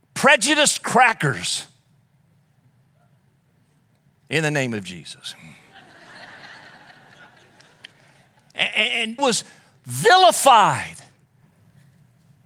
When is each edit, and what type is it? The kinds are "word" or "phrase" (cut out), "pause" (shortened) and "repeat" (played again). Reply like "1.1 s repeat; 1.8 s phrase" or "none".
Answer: 9.2 s word